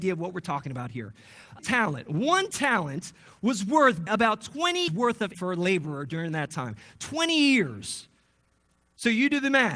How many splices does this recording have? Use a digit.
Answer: 4